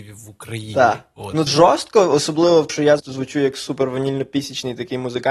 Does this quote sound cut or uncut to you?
cut